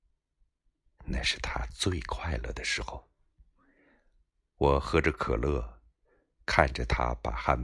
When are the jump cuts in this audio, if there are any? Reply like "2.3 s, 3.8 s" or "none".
none